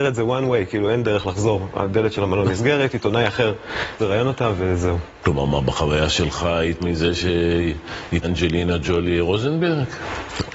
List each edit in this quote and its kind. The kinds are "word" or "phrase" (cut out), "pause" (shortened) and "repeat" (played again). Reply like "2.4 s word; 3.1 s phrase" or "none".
4.0 s word; 6.8 s word; 8.2 s word